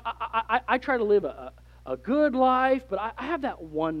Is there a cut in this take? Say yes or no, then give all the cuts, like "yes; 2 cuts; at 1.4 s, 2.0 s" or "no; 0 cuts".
no; 0 cuts